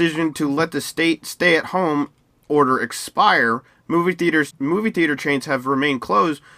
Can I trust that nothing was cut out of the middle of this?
no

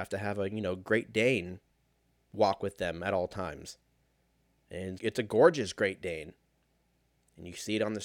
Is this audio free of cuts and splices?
no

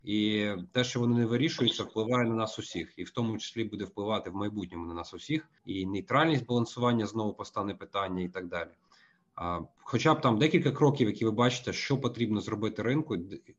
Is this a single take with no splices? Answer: no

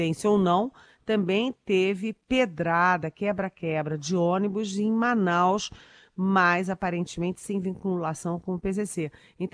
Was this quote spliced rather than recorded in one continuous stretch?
no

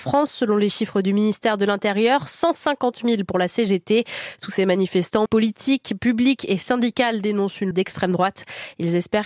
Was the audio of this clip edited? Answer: yes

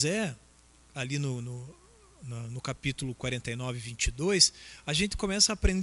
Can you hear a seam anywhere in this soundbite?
no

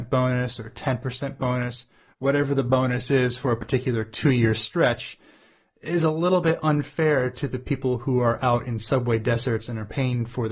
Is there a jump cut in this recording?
no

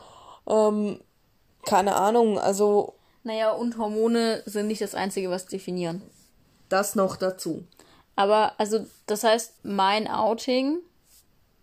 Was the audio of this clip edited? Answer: yes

